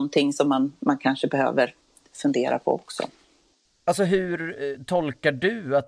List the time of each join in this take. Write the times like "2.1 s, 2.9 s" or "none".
none